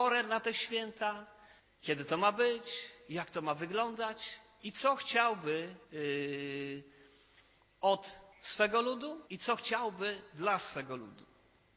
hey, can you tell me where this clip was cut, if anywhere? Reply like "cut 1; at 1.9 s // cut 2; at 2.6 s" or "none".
cut 1; at 1.6 s // cut 2; at 5.8 s // cut 3; at 8.3 s // cut 4; at 9.3 s

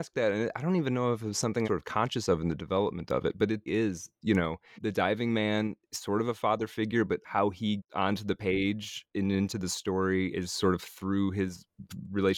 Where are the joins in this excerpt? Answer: cut 1; at 1.6 s // cut 2; at 3.7 s // cut 3; at 4.7 s // cut 4; at 5.8 s // cut 5; at 7.2 s // cut 6; at 7.8 s

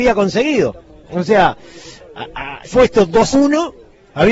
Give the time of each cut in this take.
cut 1; at 2.7 s // cut 2; at 3.3 s

